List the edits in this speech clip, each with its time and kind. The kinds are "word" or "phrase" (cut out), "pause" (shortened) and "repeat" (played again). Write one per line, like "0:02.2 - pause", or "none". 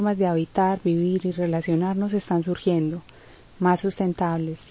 none